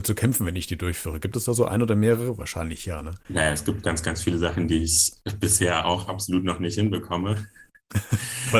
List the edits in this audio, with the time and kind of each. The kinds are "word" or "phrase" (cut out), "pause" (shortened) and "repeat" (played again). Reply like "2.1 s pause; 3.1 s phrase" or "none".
none